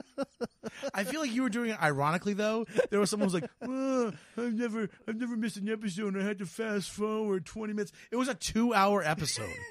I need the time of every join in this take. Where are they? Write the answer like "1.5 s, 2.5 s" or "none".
none

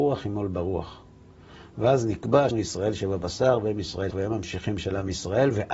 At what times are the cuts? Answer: 2.5 s, 4.1 s

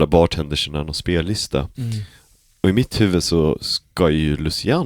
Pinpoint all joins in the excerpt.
none

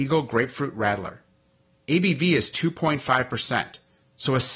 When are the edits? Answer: none

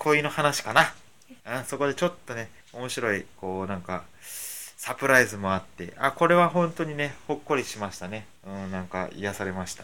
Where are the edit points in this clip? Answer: 1.4 s, 2.6 s, 8.4 s

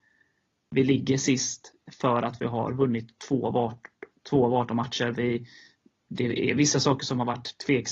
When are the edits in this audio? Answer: none

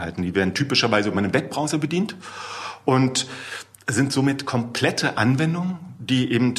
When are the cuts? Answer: none

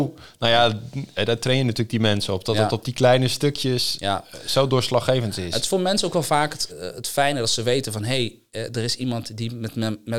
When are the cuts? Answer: 6.7 s

